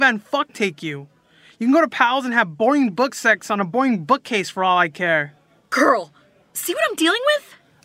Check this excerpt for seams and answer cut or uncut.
uncut